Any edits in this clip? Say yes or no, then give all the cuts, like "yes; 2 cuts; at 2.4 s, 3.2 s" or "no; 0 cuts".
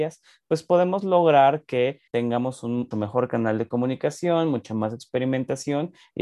yes; 2 cuts; at 2.1 s, 2.9 s